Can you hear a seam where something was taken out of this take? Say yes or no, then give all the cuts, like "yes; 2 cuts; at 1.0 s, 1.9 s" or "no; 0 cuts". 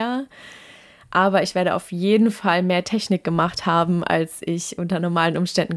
no; 0 cuts